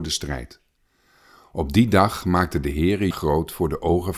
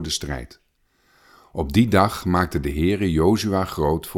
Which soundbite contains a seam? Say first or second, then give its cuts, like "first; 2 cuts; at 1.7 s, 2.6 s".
first; 1 cut; at 3.1 s